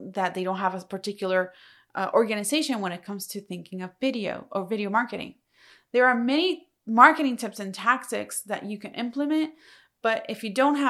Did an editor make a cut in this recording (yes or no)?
no